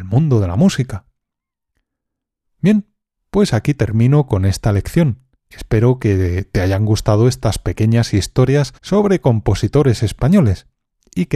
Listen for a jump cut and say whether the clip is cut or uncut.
cut